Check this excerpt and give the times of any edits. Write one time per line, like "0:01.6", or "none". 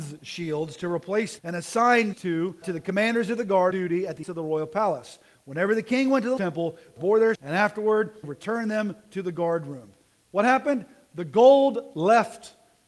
0:01.4
0:02.1
0:02.6
0:03.7
0:04.2
0:06.4
0:07.0
0:07.3
0:08.2